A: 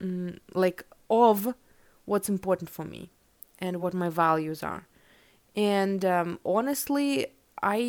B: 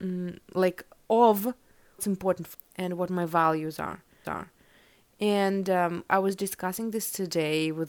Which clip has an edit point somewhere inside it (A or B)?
B